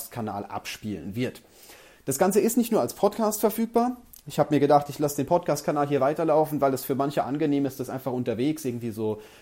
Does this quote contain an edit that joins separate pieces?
no; 0 cuts

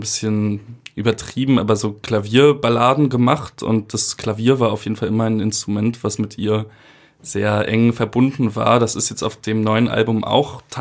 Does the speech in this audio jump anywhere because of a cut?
no; 0 cuts

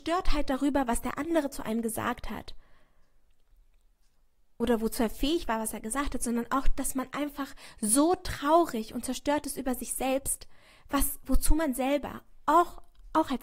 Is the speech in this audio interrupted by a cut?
no; 0 cuts

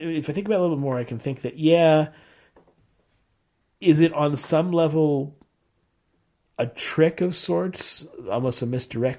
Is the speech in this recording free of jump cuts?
yes; 0 cuts

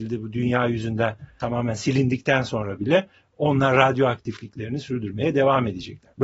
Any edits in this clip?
no; 0 cuts

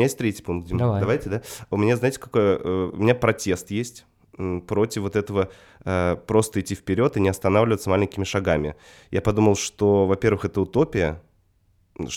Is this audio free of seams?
yes; 0 cuts

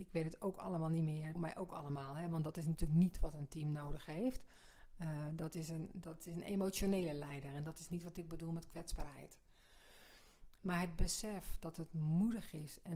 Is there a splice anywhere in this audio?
yes; 1 cut; at 1.4 s

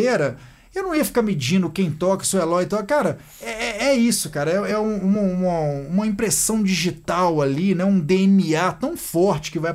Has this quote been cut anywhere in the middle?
no; 0 cuts

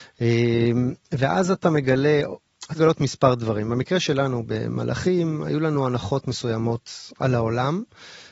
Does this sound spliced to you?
yes; 1 cut; at 2.7 s

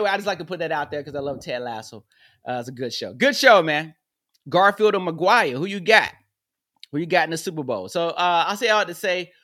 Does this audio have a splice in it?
no; 0 cuts

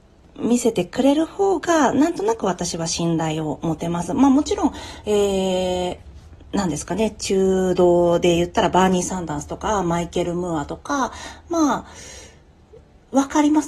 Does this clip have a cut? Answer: no; 0 cuts

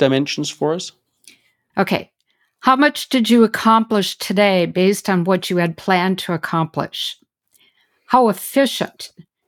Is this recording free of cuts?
yes; 0 cuts

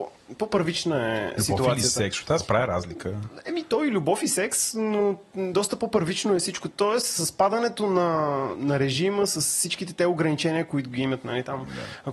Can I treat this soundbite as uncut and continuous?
no; 1 cut; at 8.5 s

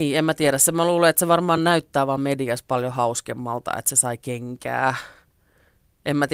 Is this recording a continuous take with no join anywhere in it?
yes; 0 cuts

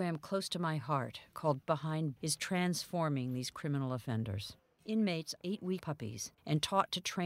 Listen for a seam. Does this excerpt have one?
yes; 4 cuts; at 1.6 s, 2.2 s, 5.4 s, 5.8 s

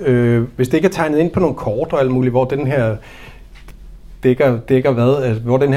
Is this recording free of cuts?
yes; 0 cuts

